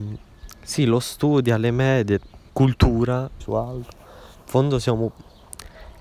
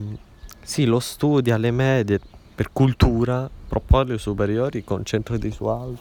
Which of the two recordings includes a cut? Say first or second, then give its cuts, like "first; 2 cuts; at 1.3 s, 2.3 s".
first; 2 cuts; at 2.5 s, 3.4 s